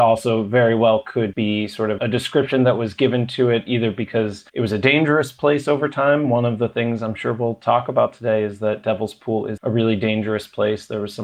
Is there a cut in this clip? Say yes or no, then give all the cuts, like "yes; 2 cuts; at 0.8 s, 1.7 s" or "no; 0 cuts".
yes; 4 cuts; at 1.3 s, 2.0 s, 4.5 s, 9.6 s